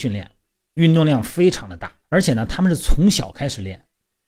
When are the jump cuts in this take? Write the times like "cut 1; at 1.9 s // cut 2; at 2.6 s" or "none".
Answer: cut 1; at 2.0 s